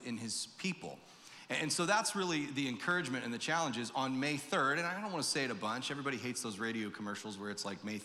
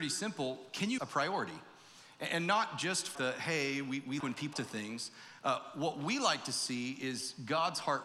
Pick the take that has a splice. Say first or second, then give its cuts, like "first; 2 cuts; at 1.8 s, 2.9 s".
second; 4 cuts; at 1.0 s, 3.1 s, 4.2 s, 4.5 s